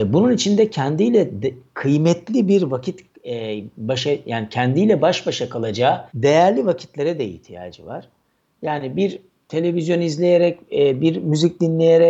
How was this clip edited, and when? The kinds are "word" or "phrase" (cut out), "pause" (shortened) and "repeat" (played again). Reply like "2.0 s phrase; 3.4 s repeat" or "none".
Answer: 6.1 s pause